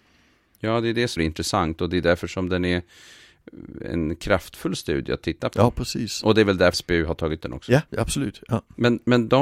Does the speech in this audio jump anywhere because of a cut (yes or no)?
yes